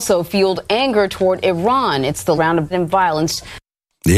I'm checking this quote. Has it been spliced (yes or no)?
yes